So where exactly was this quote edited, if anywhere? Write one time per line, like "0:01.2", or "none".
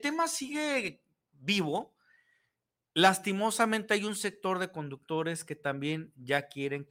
none